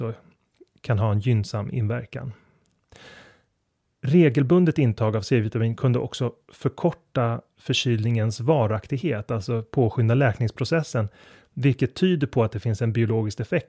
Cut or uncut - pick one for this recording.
uncut